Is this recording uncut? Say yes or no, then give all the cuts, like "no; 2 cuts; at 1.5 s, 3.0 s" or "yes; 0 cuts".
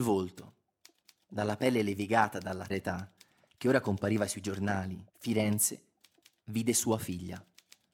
no; 2 cuts; at 2.7 s, 5.1 s